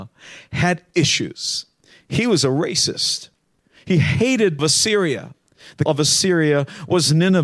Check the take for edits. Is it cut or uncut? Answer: cut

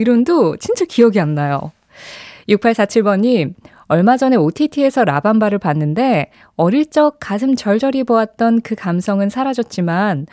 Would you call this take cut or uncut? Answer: uncut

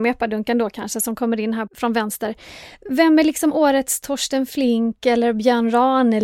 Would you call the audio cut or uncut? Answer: uncut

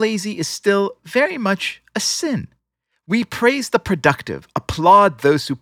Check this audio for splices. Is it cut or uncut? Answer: uncut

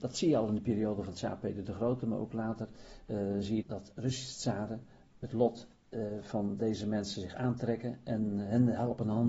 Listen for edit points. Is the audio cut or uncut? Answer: cut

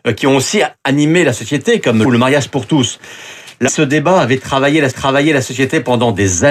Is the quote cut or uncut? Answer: cut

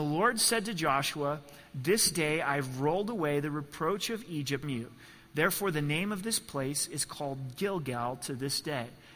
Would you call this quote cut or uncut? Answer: cut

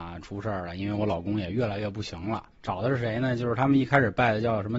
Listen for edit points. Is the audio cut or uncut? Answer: cut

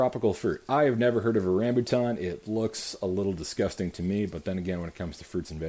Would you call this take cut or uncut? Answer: uncut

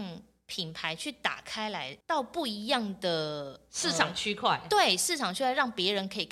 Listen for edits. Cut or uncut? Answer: cut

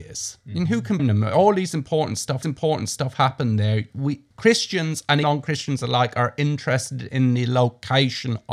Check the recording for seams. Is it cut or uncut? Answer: cut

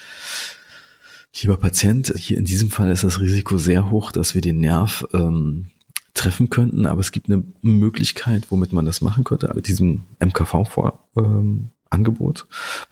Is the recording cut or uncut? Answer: cut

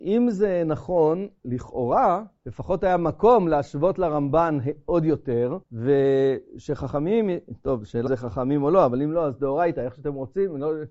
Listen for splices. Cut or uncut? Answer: cut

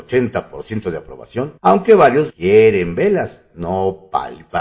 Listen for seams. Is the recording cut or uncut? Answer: cut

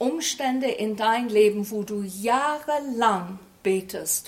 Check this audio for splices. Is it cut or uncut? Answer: uncut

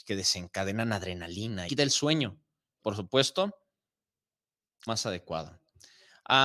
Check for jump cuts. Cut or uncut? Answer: cut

